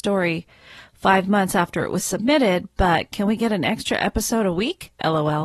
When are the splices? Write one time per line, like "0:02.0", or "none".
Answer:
none